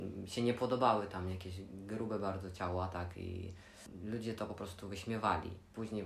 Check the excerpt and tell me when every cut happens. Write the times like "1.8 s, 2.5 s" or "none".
none